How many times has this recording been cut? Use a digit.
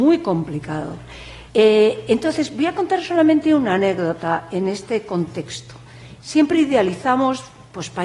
1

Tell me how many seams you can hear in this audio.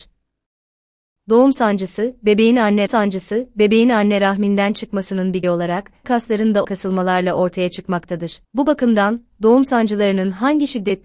5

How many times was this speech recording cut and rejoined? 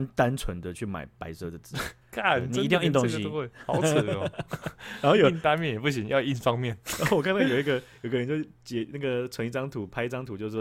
1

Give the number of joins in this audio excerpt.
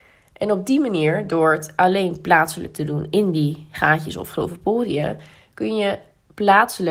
0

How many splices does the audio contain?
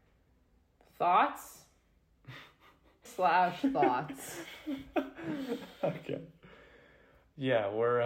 1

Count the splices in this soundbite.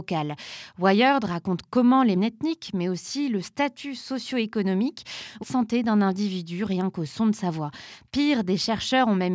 2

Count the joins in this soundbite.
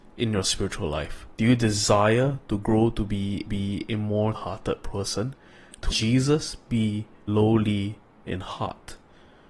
5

